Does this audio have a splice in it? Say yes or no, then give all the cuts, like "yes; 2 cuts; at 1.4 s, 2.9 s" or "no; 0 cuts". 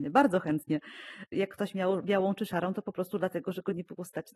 no; 0 cuts